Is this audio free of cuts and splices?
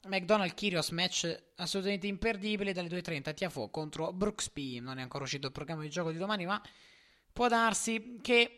yes; 0 cuts

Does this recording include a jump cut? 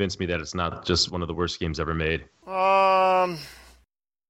no; 0 cuts

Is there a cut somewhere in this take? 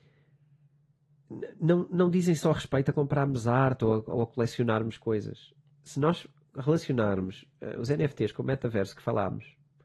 no; 0 cuts

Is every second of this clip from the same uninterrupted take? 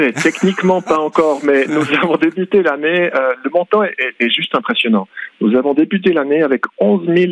no; 1 cut; at 4.1 s

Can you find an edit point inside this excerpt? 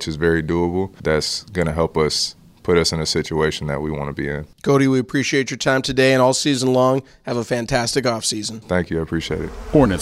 no; 0 cuts

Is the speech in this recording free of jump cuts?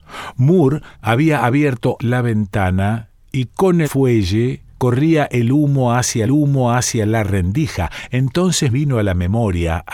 no; 6 cuts; at 0.9 s, 2.0 s, 3.8 s, 4.7 s, 6.3 s, 8.7 s

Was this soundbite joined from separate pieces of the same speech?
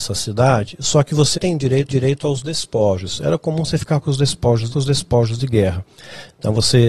yes; 3 cuts; at 1.3 s, 1.9 s, 4.7 s

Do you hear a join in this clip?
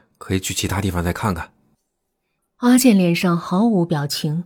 no; 0 cuts

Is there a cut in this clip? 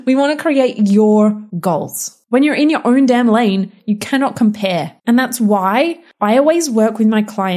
yes; 2 cuts; at 1.5 s, 5.0 s

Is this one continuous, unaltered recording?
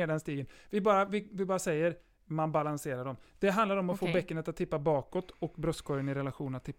yes; 0 cuts

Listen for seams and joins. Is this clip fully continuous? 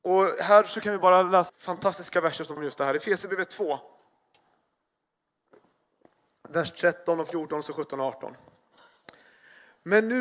no; 2 cuts; at 1.5 s, 2.6 s

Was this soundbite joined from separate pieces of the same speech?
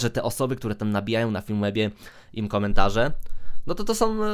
no; 0 cuts

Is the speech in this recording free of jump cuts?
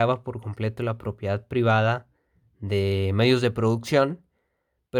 yes; 0 cuts

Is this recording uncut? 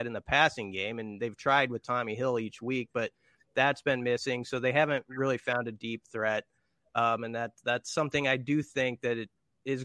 yes; 0 cuts

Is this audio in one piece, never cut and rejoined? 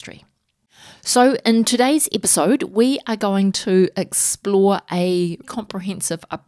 no; 1 cut; at 5.4 s

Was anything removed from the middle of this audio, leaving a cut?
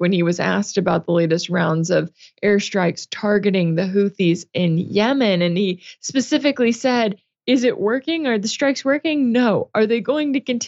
no; 0 cuts

